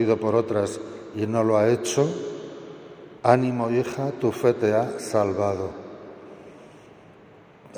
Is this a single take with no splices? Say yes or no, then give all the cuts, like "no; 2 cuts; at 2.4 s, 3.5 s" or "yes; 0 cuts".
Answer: no; 1 cut; at 3.2 s